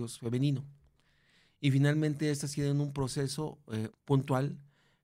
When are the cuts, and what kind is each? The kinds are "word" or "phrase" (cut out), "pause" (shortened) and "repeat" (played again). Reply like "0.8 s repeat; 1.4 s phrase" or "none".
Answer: 3.9 s word

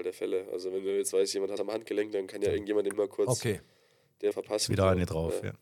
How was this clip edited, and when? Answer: 1.6 s word; 2.9 s word; 4.3 s word

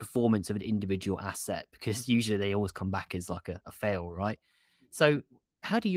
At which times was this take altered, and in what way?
none

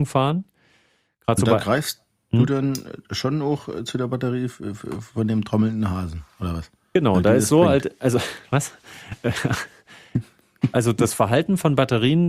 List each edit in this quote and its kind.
none

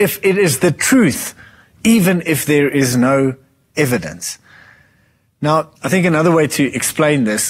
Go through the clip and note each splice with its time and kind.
5.8 s pause

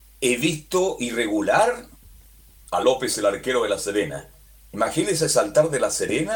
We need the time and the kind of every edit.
none

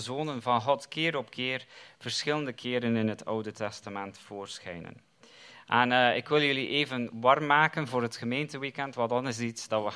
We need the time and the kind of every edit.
none

